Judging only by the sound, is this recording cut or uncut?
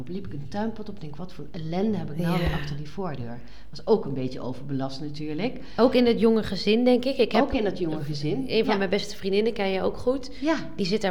uncut